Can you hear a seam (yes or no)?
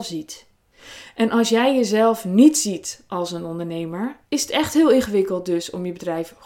yes